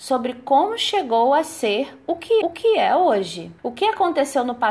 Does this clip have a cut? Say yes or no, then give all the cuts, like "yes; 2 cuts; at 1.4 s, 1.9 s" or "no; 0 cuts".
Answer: yes; 2 cuts; at 2.4 s, 3.6 s